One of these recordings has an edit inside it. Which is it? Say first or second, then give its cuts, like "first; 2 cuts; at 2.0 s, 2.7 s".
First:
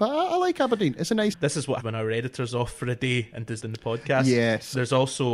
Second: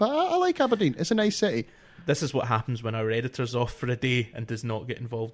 first; 3 cuts; at 1.3 s, 1.8 s, 3.6 s